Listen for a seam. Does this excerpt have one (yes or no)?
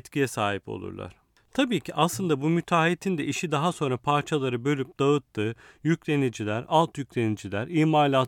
no